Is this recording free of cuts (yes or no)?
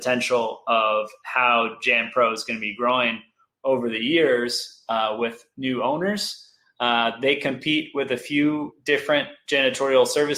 yes